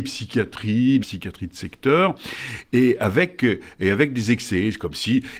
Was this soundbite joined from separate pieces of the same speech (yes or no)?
yes